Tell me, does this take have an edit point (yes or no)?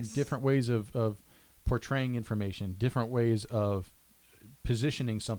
no